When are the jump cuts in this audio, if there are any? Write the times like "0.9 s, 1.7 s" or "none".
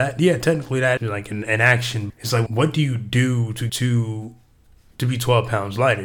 1.0 s, 2.1 s, 2.5 s, 3.7 s

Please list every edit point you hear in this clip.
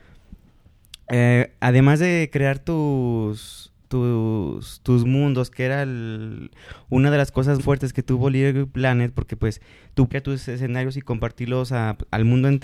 7.6 s, 10.1 s

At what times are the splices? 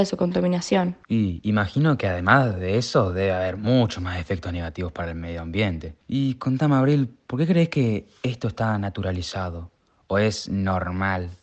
1.0 s, 6.0 s

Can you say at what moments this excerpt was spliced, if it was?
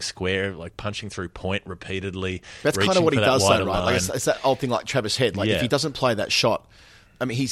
none

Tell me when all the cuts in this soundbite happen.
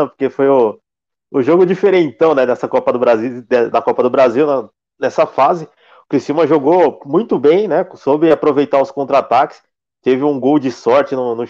3.7 s

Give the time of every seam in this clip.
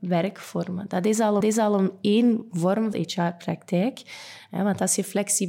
1.4 s, 2.9 s

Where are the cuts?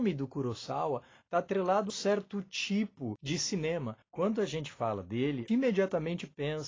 1.9 s, 4.0 s, 5.5 s

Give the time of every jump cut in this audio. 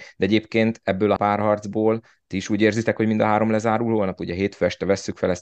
1.2 s

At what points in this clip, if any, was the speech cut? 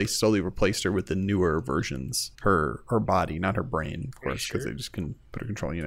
2.3 s

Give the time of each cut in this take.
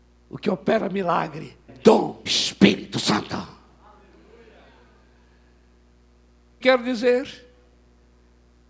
1.7 s, 2.3 s, 6.6 s

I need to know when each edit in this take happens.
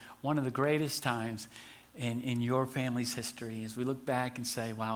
none

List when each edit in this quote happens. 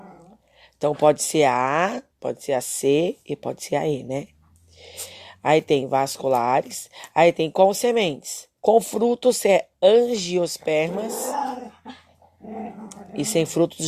2.1 s, 8.6 s

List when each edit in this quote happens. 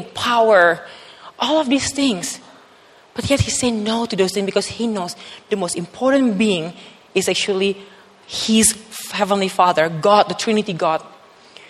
none

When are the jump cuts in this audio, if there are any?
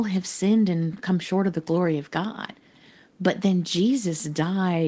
none

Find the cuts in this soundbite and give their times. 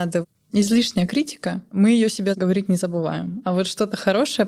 none

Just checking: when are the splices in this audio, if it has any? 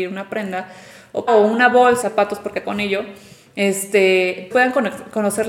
1.3 s, 2.0 s, 2.6 s, 4.5 s

